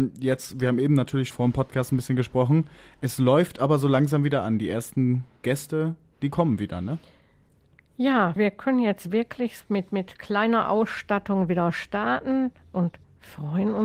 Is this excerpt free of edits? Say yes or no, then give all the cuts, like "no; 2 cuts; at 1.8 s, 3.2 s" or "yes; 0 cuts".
no; 3 cuts; at 1.3 s, 8.4 s, 9.6 s